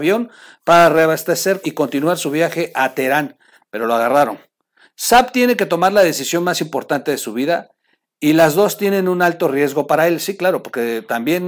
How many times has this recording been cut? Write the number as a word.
one